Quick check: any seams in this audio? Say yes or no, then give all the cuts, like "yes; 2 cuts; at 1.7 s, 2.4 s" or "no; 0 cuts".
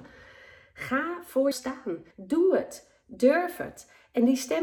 yes; 2 cuts; at 1.5 s, 2.1 s